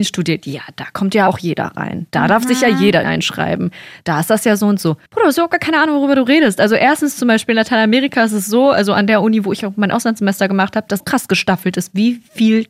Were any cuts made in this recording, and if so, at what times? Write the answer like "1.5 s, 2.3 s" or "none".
1.3 s, 3.0 s, 5.1 s, 11.0 s